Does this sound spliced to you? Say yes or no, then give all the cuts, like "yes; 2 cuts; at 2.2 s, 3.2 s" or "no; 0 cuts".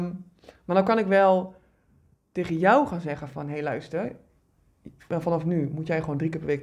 no; 0 cuts